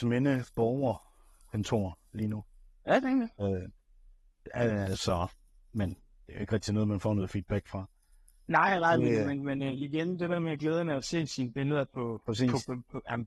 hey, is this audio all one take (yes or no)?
yes